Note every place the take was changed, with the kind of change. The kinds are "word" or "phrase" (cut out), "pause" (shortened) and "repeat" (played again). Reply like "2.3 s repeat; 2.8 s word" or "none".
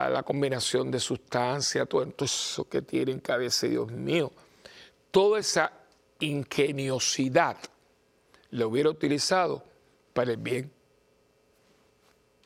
none